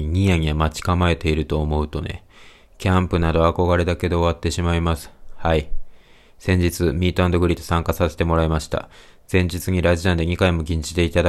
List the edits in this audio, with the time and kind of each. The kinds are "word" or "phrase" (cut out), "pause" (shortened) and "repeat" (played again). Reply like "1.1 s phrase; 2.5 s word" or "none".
none

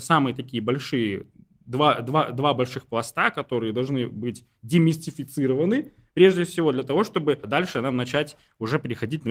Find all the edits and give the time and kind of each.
none

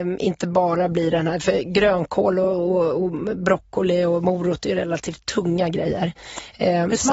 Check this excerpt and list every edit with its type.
none

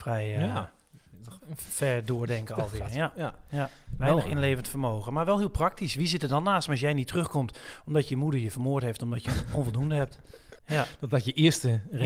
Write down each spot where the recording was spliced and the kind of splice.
10.6 s pause

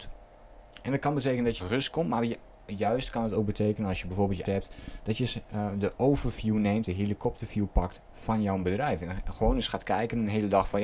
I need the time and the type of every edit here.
1.6 s phrase; 4.5 s phrase

